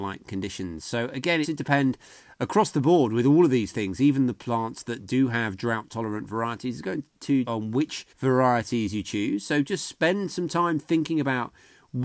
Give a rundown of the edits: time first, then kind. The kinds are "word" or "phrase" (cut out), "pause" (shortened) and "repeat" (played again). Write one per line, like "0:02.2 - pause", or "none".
0:01.4 - phrase
0:07.4 - phrase
0:08.1 - pause

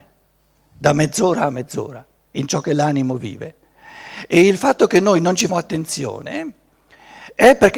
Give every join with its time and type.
0:05.5 - word

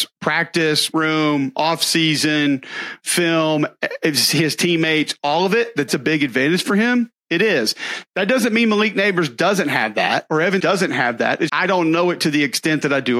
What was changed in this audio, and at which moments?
0:00.9 - word
0:05.9 - word
0:10.6 - word
0:11.5 - word

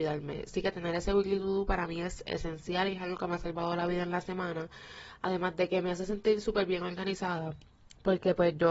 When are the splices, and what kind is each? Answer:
none

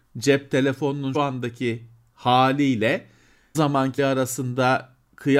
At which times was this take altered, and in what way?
0:01.1 - word
0:03.5 - word
0:04.0 - word

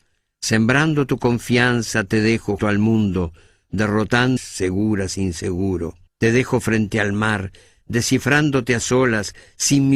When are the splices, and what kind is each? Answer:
0:02.6 - word
0:04.4 - word
0:06.1 - pause

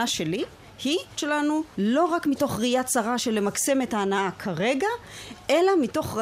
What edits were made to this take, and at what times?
0:01.2 - phrase

